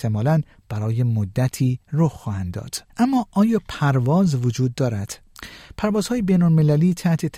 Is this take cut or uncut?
cut